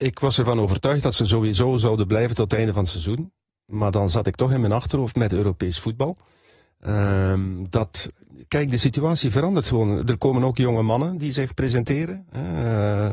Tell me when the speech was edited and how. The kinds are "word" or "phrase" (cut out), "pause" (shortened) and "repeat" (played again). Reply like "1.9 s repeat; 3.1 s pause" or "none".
none